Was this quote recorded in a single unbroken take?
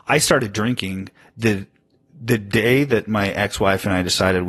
yes; 0 cuts

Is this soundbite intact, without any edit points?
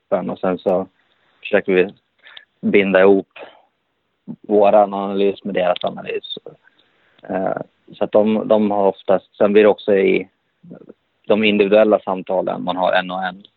yes; 0 cuts

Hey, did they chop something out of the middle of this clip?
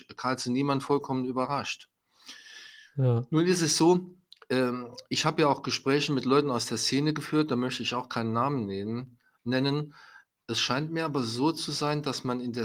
no; 0 cuts

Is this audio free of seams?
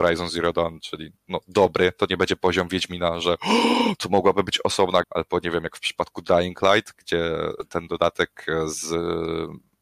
no; 1 cut; at 5.0 s

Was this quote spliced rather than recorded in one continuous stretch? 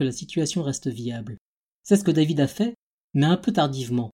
no; 0 cuts

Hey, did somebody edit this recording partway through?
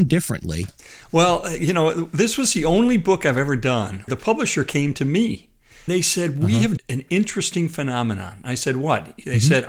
yes; 3 cuts; at 4.1 s, 5.9 s, 6.8 s

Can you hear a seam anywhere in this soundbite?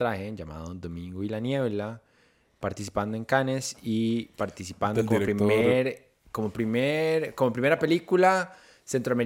no; 0 cuts

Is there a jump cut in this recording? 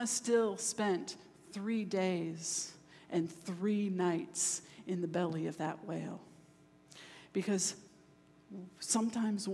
no; 0 cuts

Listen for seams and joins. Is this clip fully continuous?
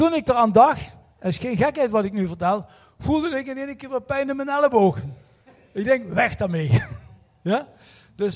yes; 0 cuts

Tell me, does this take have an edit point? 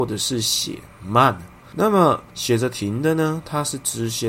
yes; 1 cut; at 2.3 s

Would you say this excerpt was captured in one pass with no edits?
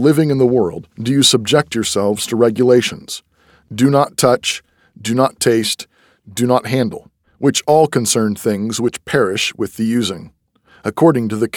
no; 2 cuts; at 0.9 s, 7.2 s

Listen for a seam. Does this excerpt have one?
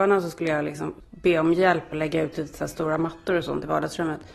yes; 1 cut; at 1.9 s

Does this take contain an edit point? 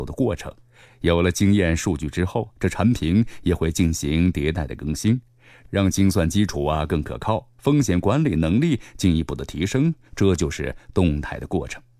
no; 0 cuts

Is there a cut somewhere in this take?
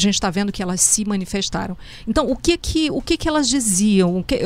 no; 0 cuts

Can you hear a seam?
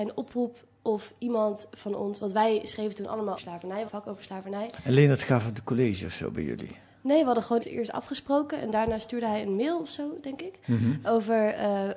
yes; 3 cuts; at 3.4 s, 3.9 s, 7.6 s

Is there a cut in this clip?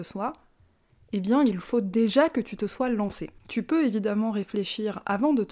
yes; 1 cut; at 3.4 s

